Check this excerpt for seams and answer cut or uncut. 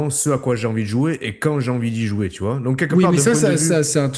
uncut